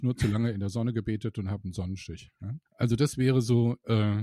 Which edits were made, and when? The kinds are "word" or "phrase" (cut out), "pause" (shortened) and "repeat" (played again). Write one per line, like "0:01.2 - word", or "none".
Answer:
0:02.7 - pause